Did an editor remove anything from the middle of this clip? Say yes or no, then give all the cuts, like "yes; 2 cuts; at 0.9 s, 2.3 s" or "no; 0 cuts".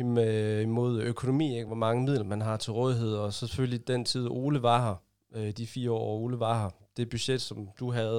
no; 0 cuts